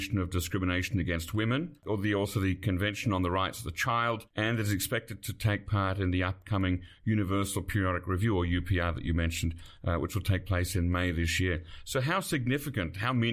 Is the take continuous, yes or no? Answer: yes